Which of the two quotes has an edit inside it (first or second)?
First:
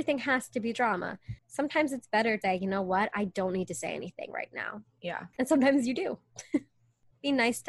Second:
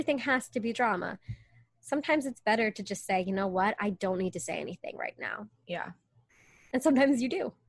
first